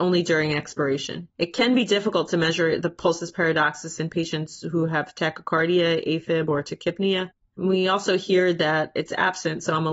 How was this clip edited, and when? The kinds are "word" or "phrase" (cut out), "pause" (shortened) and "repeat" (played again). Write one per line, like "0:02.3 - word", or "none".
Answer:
0:01.3 - pause